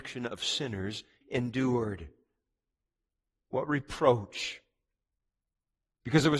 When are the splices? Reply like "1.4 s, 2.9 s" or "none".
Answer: 1.2 s